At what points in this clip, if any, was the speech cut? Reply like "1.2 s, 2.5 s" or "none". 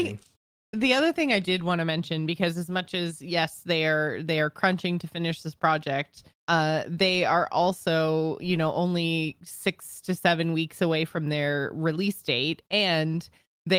6.3 s